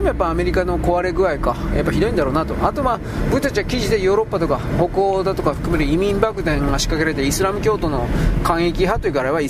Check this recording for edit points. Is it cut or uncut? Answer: uncut